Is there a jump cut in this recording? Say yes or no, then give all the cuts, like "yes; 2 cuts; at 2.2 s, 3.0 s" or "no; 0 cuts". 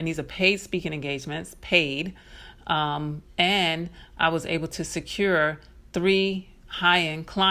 no; 0 cuts